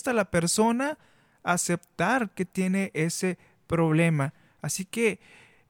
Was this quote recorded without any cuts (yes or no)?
yes